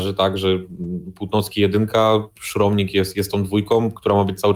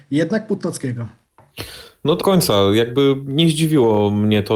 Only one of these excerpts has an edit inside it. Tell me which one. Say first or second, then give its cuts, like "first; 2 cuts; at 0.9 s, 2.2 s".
second; 1 cut; at 2.2 s